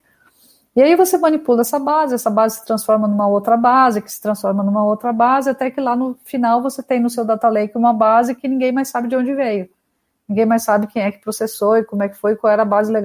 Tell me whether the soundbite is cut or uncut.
uncut